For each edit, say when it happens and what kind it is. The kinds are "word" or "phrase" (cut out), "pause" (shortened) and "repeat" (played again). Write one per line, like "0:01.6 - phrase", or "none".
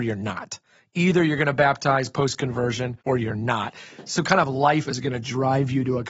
0:03.0 - pause
0:04.9 - word